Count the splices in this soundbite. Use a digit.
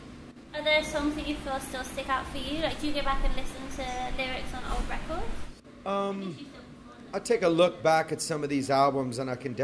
1